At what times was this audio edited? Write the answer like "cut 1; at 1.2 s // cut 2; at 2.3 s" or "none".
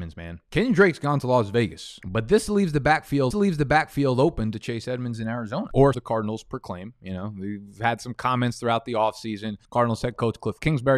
cut 1; at 3.3 s // cut 2; at 5.9 s // cut 3; at 9.6 s